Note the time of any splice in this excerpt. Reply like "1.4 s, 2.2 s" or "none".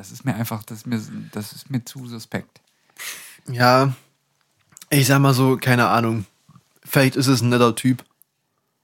none